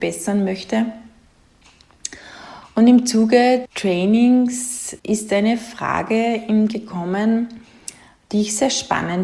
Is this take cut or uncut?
cut